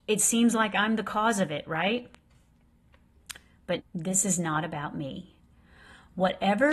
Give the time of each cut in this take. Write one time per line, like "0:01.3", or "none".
0:03.8